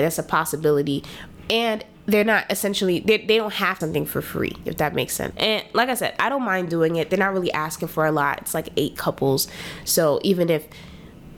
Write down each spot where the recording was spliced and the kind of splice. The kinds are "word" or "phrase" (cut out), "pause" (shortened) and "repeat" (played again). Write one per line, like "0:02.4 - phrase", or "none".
0:03.8 - phrase
0:05.3 - word

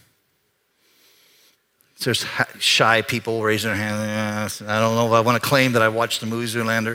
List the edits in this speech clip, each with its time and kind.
none

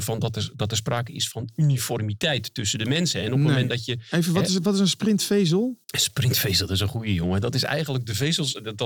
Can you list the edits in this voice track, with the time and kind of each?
0:05.8 - pause

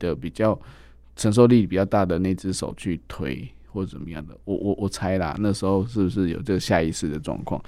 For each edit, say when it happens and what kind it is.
none

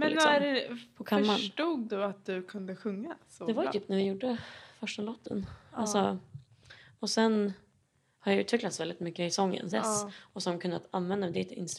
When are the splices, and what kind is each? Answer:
0:09.7 - word

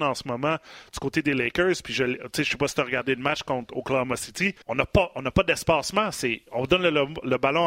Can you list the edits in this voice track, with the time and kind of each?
0:04.6 - pause

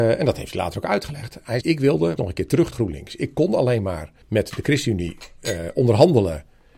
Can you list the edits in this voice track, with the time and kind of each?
0:01.6 - word
0:02.2 - word
0:02.7 - word
0:04.2 - pause

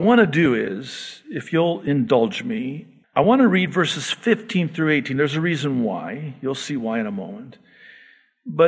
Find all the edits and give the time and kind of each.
0:03.0 - pause

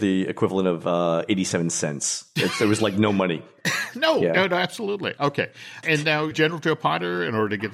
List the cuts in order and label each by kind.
0:05.8 - word
0:06.3 - word

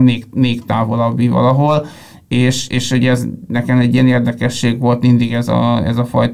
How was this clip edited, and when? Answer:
none

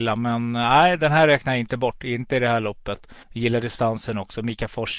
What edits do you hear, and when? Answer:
0:03.2 - pause

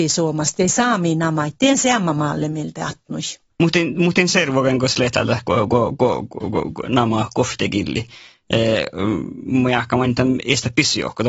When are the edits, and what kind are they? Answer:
none

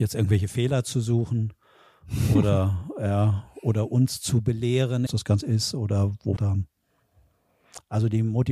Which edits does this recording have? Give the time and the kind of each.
0:05.1 - phrase
0:05.4 - word
0:06.4 - phrase

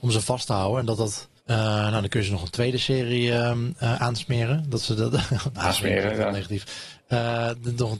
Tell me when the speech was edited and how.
0:01.4 - pause

